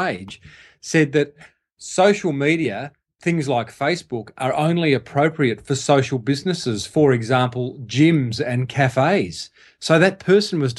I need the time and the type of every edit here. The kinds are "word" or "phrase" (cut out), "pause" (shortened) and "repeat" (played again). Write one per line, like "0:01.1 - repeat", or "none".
none